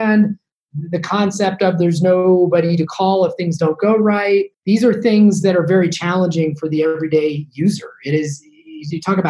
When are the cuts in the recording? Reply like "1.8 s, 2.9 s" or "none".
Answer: 4.5 s